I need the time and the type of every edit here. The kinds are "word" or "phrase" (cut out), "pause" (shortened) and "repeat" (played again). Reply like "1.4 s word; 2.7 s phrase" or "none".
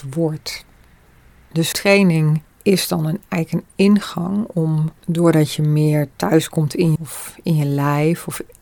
1.7 s word; 5.0 s pause; 7.0 s word